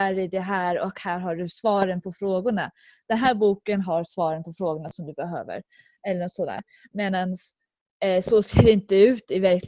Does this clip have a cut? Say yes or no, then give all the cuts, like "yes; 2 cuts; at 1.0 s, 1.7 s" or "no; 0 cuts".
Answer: no; 0 cuts